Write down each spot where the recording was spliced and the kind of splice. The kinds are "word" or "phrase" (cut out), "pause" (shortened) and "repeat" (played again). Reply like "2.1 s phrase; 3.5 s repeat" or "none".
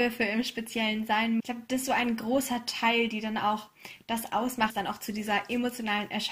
1.4 s word; 1.8 s word; 4.7 s word